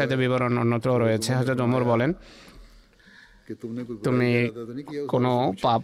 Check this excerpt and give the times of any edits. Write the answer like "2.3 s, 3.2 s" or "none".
none

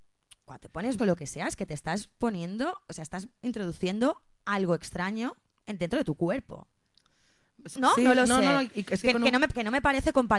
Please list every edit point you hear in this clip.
1.0 s, 7.8 s

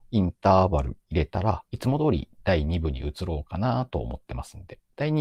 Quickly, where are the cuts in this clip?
1.0 s, 1.7 s

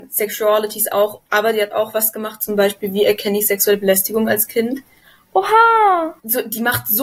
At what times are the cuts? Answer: none

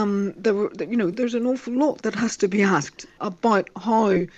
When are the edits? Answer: 1.1 s, 2.0 s, 3.2 s

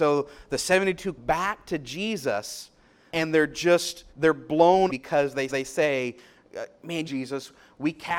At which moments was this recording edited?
1.2 s, 3.1 s, 4.1 s, 4.9 s, 5.5 s, 7.0 s

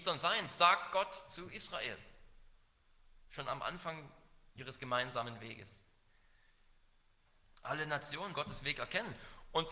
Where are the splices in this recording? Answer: 8.3 s

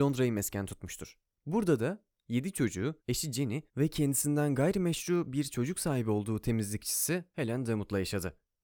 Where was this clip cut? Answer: 1.3 s, 3.0 s, 3.7 s

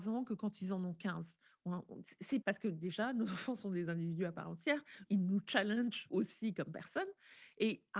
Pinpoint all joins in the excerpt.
2.4 s, 5.1 s

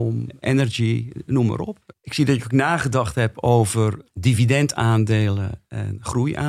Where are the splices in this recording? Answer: none

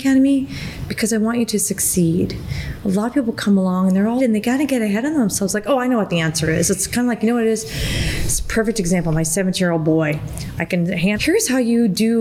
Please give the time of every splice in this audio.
4.2 s, 11.1 s

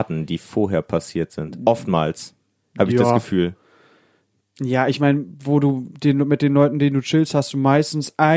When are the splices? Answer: none

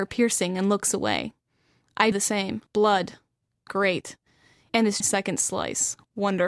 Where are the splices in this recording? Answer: 2.1 s, 2.7 s, 5.0 s

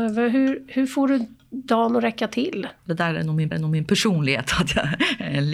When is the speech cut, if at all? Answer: 2.8 s, 3.5 s

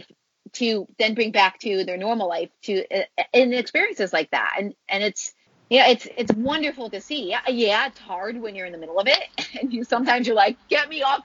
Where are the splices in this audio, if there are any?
5.5 s

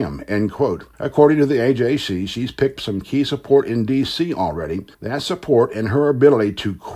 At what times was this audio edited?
0.9 s, 2.8 s, 4.9 s

